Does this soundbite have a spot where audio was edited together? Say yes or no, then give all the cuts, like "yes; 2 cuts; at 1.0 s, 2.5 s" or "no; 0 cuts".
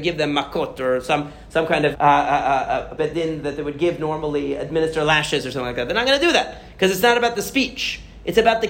yes; 2 cuts; at 1.9 s, 3.0 s